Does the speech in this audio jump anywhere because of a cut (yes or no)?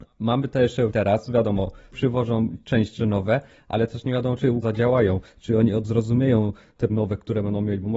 yes